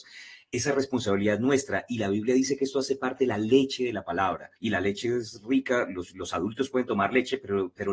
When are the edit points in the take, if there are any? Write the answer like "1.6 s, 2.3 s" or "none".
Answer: 4.6 s